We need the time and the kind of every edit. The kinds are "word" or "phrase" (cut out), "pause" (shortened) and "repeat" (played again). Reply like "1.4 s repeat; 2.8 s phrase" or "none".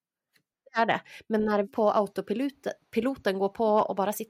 1.6 s word